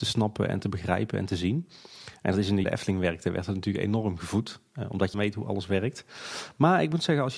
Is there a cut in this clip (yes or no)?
yes